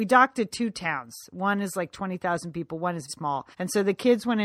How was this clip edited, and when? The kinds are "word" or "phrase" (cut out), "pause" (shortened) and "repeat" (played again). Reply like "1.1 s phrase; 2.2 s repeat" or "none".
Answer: 3.1 s word; 3.5 s pause